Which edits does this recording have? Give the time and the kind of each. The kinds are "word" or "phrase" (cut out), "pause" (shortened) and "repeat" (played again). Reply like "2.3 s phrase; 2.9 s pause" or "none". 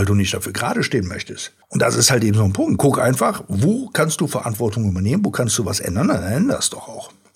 1.6 s pause

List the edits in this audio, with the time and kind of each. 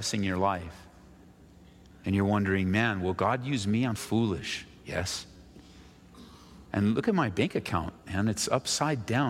4.0 s word

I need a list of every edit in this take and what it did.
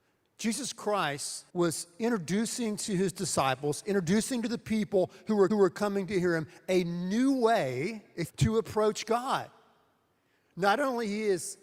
1.5 s pause; 5.5 s repeat; 8.3 s phrase

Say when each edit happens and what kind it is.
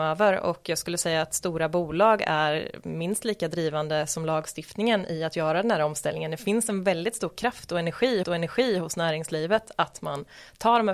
8.2 s repeat

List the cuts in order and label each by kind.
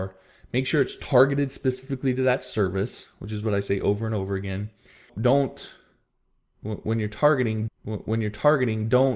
5.1 s word; 7.7 s repeat

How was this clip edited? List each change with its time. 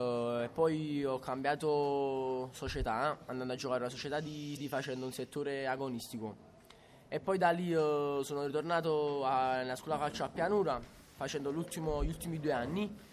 4.6 s word

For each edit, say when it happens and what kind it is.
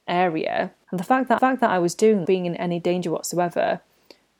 1.4 s repeat; 2.2 s phrase

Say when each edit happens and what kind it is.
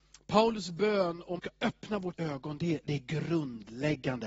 1.4 s phrase; 2.1 s word

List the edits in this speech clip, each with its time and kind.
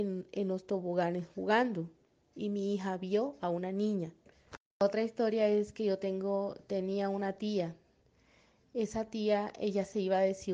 none

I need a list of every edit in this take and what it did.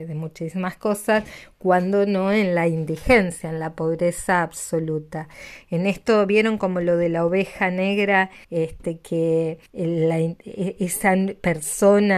8.4 s pause; 9.7 s pause

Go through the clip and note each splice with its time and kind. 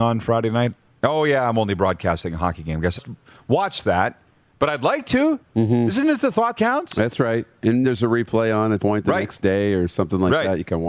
3.0 s phrase; 6.6 s word; 7.8 s word; 8.8 s word

